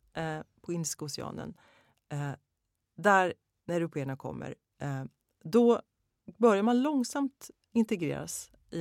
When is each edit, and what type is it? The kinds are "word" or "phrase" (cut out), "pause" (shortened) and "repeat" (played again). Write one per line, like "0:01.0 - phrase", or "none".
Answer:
none